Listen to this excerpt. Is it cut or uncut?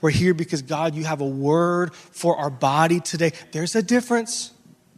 uncut